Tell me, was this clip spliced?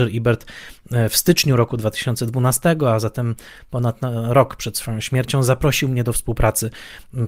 no; 0 cuts

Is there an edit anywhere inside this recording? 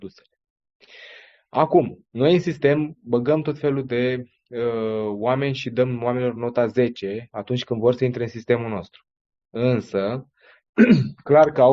no; 0 cuts

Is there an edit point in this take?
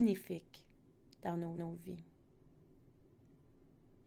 yes; 1 cut; at 1.6 s

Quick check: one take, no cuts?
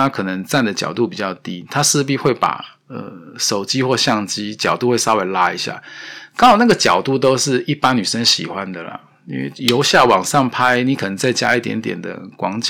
yes; 0 cuts

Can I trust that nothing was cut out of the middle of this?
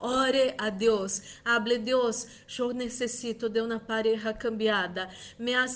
yes; 0 cuts

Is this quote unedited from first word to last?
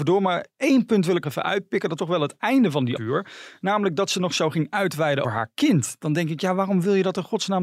no; 4 cuts; at 1.2 s, 2.0 s, 3.0 s, 5.2 s

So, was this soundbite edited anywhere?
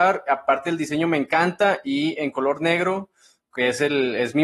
no; 0 cuts

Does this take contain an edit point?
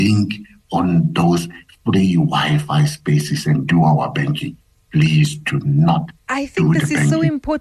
no; 0 cuts

